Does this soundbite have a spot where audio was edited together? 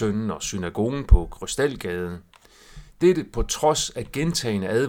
no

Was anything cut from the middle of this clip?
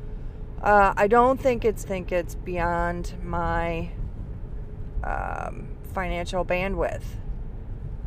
yes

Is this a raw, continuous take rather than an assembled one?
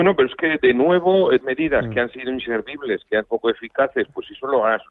no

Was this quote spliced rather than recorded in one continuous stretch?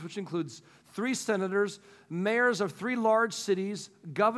no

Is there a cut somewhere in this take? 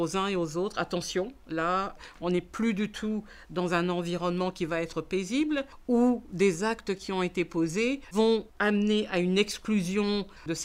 no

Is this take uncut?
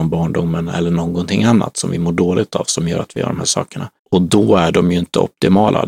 no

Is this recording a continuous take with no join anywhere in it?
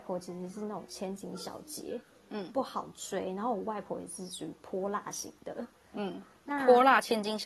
yes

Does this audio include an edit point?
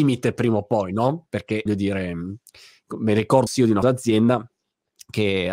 yes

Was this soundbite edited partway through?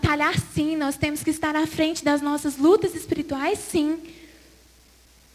no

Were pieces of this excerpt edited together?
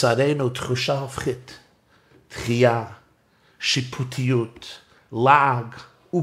no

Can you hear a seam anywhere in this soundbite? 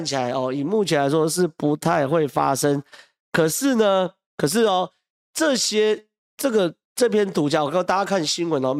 no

